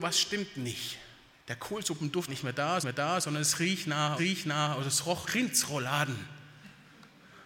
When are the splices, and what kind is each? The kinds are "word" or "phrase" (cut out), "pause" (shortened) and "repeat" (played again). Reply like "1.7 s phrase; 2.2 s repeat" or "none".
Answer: 1.3 s pause; 2.3 s word; 2.8 s repeat; 4.2 s repeat; 5.3 s word